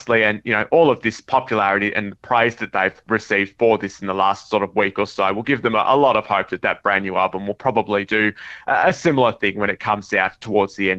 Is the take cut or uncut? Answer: uncut